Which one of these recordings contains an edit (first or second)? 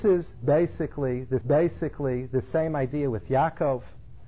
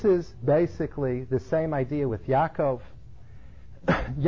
first